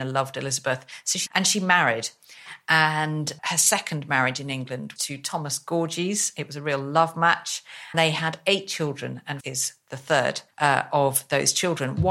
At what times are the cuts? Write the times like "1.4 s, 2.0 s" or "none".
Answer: 1.3 s, 3.4 s, 5.0 s, 7.9 s, 9.4 s, 10.5 s

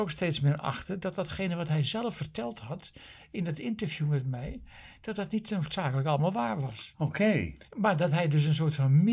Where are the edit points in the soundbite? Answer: 7.7 s

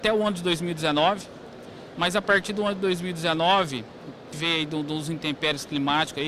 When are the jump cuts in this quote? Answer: 4.3 s

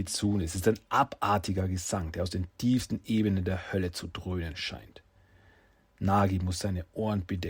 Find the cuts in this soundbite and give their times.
none

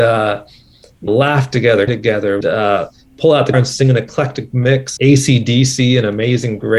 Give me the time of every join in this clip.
1.1 s, 1.9 s, 2.4 s, 3.5 s, 5.0 s

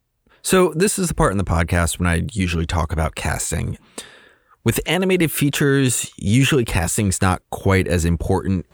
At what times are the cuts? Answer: none

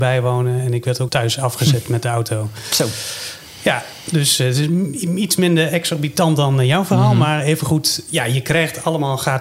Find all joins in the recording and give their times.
1.1 s

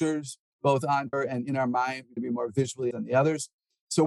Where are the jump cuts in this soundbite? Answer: 1.1 s, 2.2 s, 2.9 s

